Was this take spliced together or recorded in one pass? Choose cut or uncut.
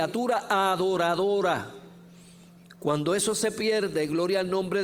uncut